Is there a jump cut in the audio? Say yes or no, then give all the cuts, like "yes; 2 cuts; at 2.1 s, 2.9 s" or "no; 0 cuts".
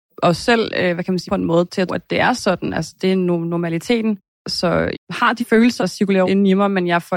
yes; 6 cuts; at 1.3 s, 1.9 s, 4.9 s, 5.4 s, 5.8 s, 6.2 s